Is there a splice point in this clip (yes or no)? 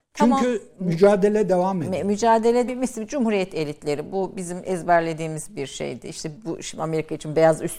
yes